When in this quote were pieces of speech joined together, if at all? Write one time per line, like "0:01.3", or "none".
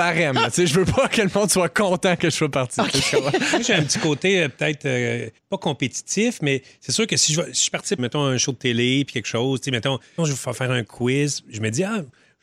0:05.4
0:08.0
0:10.2